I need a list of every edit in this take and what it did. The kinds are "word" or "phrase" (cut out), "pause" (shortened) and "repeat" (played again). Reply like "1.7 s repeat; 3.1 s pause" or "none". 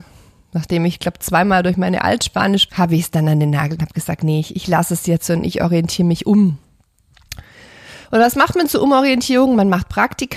2.7 s phrase; 3.8 s word